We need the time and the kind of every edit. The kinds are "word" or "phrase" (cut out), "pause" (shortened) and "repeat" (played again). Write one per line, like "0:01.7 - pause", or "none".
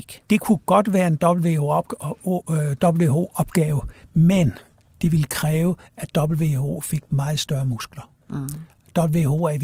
none